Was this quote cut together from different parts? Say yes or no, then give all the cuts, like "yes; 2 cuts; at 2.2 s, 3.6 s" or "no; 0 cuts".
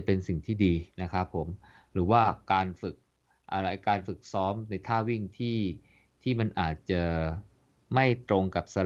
yes; 1 cut; at 0.9 s